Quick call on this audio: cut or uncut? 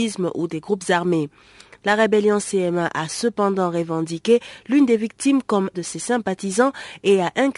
cut